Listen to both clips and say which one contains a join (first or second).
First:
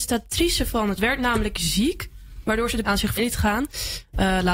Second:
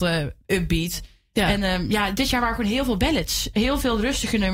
first